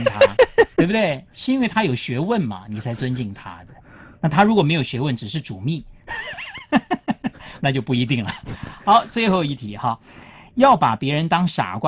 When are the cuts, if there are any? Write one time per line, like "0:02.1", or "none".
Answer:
none